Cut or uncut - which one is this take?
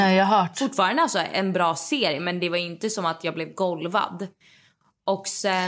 uncut